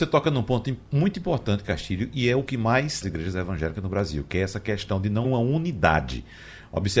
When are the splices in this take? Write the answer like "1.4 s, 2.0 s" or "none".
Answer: 2.5 s, 3.0 s, 5.2 s